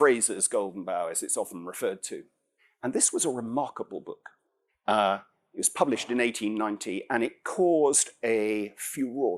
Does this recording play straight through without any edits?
yes; 0 cuts

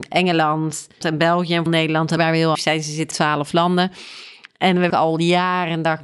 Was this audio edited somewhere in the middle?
yes; 6 cuts; at 1.0 s, 1.7 s, 2.2 s, 2.5 s, 3.1 s, 4.9 s

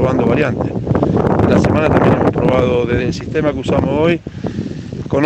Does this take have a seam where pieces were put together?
no; 0 cuts

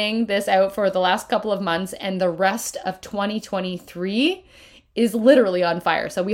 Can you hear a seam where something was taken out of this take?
no; 0 cuts

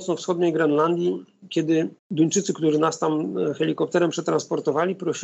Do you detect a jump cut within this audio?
yes; 1 cut; at 2.0 s

